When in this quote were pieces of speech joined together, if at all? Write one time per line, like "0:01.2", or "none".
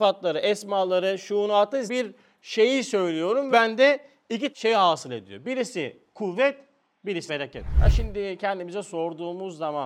0:01.9
0:03.5
0:04.5
0:07.3